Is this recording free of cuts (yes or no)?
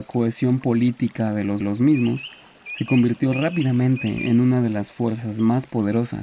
no